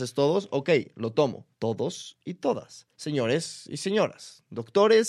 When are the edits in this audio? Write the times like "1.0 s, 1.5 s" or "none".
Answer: 1.5 s, 2.9 s